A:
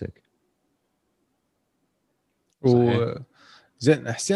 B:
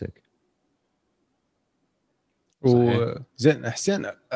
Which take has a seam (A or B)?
B